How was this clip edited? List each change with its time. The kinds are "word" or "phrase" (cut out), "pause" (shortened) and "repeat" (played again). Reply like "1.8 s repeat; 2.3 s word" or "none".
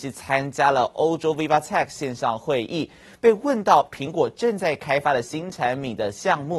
none